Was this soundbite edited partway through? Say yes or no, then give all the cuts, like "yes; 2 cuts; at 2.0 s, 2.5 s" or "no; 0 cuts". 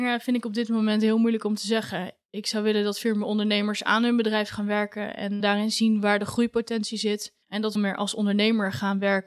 yes; 3 cuts; at 5.4 s, 7.4 s, 7.8 s